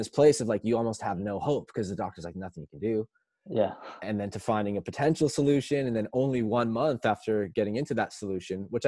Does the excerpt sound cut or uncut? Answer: uncut